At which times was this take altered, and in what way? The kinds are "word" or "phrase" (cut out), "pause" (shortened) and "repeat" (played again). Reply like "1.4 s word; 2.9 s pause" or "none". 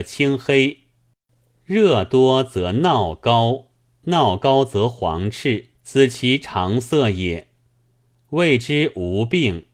5.8 s pause